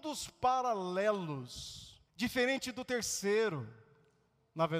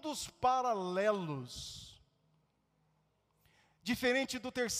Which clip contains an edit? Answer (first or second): first